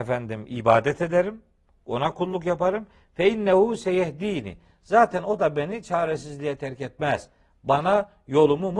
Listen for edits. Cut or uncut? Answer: uncut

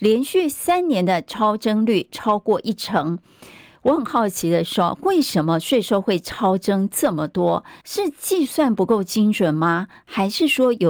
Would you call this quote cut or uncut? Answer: cut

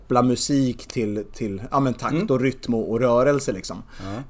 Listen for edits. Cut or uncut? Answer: uncut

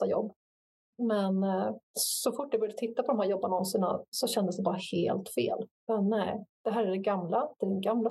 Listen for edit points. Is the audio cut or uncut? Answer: cut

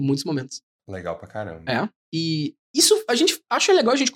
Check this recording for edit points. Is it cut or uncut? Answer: uncut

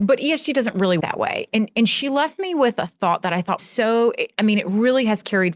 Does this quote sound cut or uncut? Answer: cut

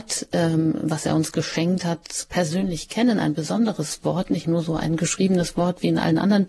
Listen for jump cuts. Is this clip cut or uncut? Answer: cut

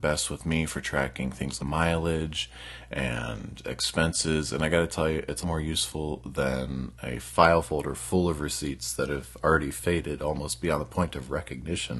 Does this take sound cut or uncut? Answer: cut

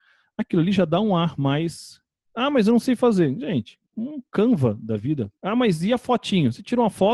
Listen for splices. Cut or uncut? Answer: cut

